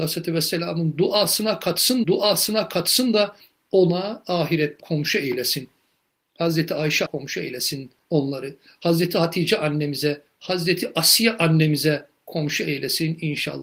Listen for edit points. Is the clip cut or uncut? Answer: cut